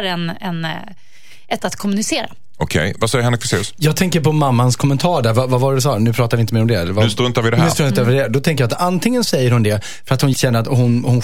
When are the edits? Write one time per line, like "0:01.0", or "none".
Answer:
0:01.6
0:10.3